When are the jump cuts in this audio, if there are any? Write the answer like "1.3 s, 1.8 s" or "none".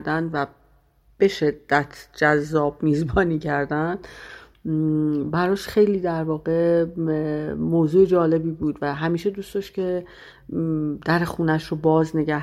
none